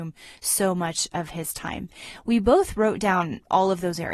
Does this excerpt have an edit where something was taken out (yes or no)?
no